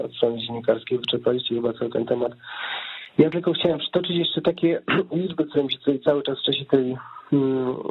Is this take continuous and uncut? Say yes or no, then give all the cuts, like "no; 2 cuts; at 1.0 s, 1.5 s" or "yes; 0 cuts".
yes; 0 cuts